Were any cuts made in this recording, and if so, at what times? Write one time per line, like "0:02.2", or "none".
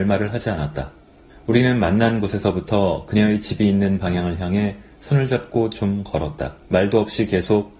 0:01.3
0:06.6